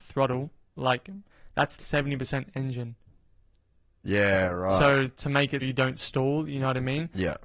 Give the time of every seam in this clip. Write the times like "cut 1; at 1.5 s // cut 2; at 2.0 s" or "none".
cut 1; at 1.8 s // cut 2; at 5.6 s